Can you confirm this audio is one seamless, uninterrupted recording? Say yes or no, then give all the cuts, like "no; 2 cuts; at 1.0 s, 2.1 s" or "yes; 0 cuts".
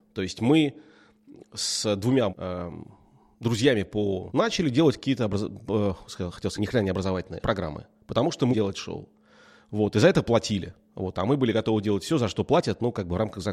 no; 6 cuts; at 1.3 s, 2.3 s, 4.3 s, 6.6 s, 7.4 s, 8.5 s